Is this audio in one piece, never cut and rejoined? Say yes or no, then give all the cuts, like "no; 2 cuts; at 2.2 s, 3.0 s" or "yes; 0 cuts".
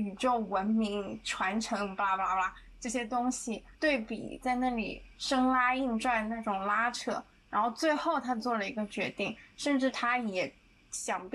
no; 2 cuts; at 3.7 s, 5.1 s